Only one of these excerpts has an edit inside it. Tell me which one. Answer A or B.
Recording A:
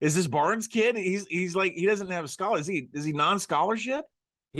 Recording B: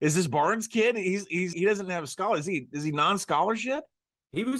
B